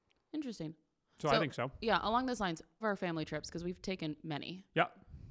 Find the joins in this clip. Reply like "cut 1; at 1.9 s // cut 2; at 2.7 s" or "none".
cut 1; at 2.8 s